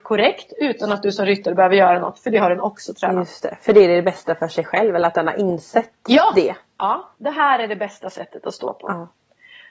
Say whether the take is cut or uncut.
cut